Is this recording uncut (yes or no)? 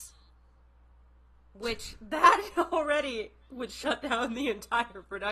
yes